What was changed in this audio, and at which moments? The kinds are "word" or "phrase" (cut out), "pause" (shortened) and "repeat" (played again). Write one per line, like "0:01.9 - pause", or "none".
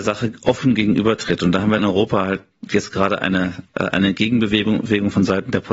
0:01.8 - word